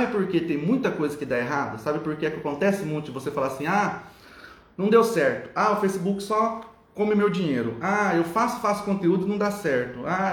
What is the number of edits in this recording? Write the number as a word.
zero